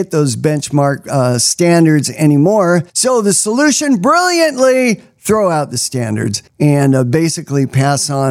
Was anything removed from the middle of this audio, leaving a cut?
yes; 2 cuts; at 2.9 s, 6.5 s

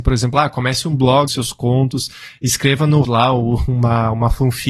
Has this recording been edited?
yes; 2 cuts; at 1.3 s, 3.0 s

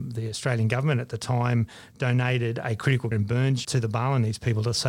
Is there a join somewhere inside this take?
yes; 2 cuts; at 3.1 s, 3.6 s

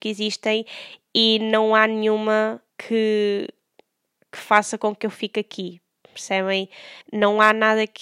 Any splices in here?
yes; 2 cuts; at 2.7 s, 7.0 s

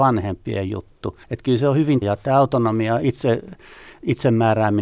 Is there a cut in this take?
yes; 2 cuts; at 1.2 s, 2.0 s

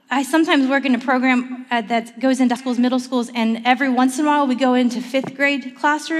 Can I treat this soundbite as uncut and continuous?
no; 1 cut; at 2.6 s

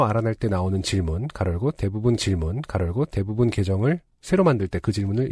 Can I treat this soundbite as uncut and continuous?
no; 1 cut; at 2.2 s

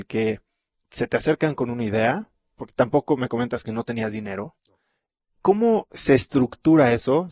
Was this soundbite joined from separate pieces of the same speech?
no; 0 cuts

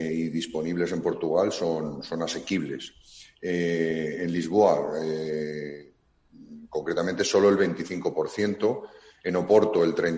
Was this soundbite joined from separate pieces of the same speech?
no; 0 cuts

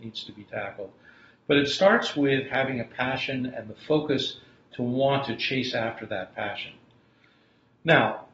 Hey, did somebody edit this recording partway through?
no; 0 cuts

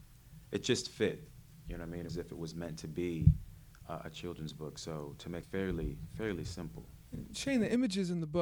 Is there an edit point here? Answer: yes; 2 cuts; at 2.1 s, 5.4 s

